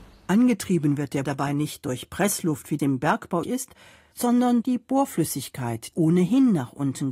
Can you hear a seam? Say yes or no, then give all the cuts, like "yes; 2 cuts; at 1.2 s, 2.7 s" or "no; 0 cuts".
yes; 5 cuts; at 1.2 s, 2.8 s, 3.4 s, 4.6 s, 5.9 s